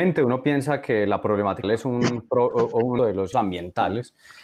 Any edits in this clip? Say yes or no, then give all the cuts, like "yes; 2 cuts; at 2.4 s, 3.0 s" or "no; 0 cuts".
yes; 3 cuts; at 1.6 s, 3.0 s, 3.3 s